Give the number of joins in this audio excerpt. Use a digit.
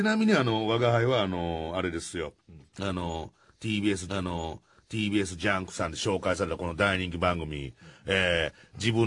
2